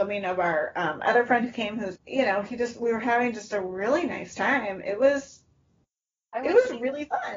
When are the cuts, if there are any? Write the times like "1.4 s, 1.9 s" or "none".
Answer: 1.9 s